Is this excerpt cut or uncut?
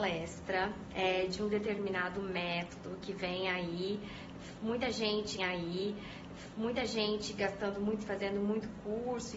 cut